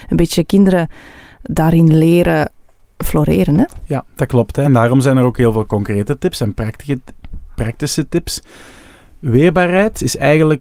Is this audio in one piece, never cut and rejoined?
yes; 0 cuts

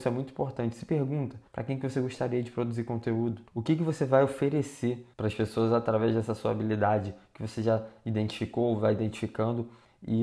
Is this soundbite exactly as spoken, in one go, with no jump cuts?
no; 3 cuts; at 1.5 s, 3.5 s, 5.1 s

